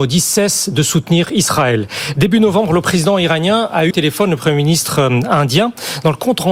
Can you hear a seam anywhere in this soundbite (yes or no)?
yes